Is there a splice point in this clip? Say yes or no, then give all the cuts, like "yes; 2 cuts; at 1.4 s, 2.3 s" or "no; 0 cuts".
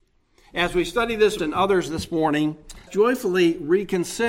yes; 2 cuts; at 1.4 s, 2.9 s